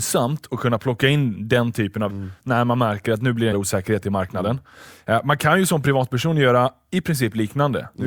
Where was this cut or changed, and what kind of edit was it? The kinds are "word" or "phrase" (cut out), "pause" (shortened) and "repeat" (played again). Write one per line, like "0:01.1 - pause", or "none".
0:02.1 - word
0:03.5 - phrase